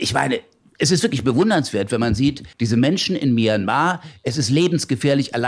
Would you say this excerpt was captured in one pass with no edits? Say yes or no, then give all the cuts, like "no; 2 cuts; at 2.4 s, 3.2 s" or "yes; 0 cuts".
no; 1 cut; at 2.5 s